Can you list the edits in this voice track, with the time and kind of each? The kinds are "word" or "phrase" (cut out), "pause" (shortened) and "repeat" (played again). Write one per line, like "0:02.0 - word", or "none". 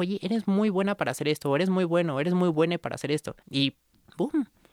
0:03.4 - pause